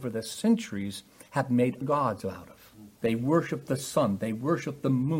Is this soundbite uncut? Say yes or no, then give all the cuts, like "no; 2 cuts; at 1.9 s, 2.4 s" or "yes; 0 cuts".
no; 2 cuts; at 1.8 s, 2.9 s